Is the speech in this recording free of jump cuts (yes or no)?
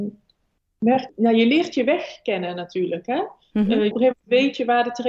no